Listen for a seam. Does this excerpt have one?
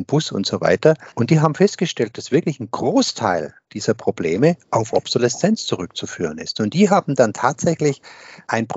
yes; 1 cut; at 1.1 s

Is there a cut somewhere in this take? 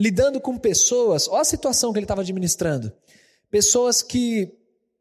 no; 0 cuts

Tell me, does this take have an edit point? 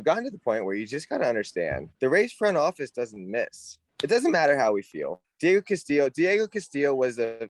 yes; 1 cut; at 1.9 s

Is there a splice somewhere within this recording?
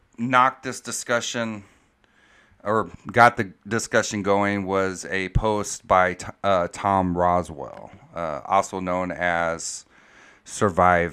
no; 0 cuts

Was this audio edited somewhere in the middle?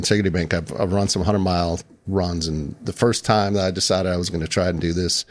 no; 0 cuts

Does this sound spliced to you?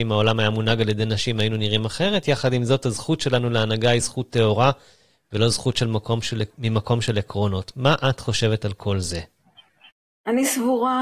no; 0 cuts

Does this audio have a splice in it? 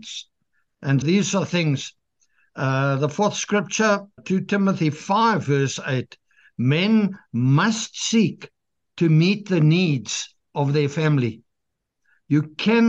yes; 2 cuts; at 1.0 s, 4.2 s

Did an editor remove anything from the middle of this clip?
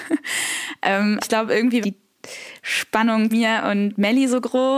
yes; 3 cuts; at 1.2 s, 1.8 s, 3.3 s

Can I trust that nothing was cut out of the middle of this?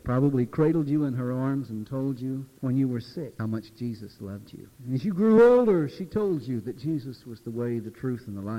yes; 0 cuts

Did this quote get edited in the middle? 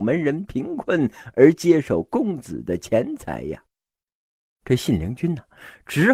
no; 0 cuts

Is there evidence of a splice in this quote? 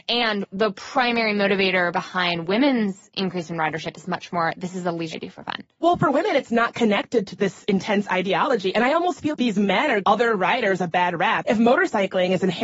yes; 4 cuts; at 5.1 s, 7.4 s, 9.3 s, 10.0 s

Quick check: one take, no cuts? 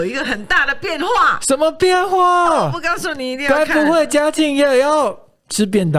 yes; 0 cuts

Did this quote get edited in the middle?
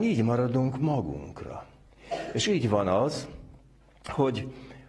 no; 0 cuts

